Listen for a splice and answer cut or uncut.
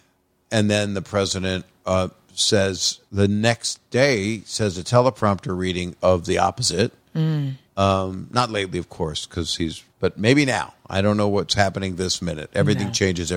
cut